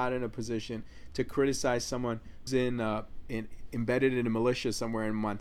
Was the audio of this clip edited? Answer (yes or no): yes